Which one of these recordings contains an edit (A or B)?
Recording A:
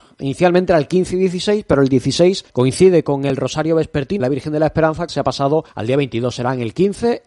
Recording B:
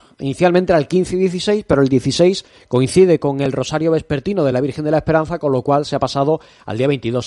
A